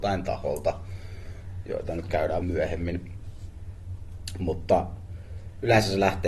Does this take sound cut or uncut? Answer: cut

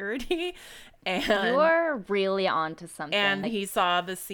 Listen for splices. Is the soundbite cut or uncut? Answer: cut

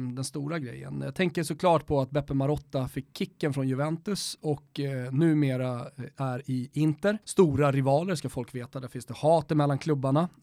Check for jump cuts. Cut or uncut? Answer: cut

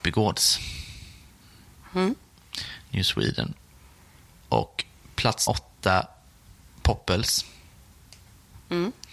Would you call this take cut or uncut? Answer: cut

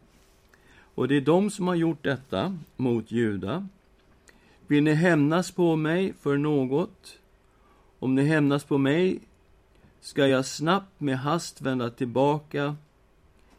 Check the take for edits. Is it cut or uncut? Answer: uncut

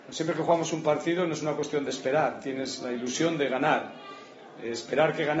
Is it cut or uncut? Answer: uncut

